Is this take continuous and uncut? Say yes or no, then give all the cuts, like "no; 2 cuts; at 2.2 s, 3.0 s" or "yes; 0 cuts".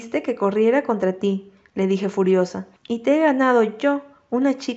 no; 1 cut; at 2.8 s